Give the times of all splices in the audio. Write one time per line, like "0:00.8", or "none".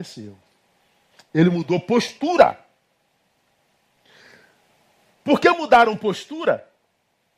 none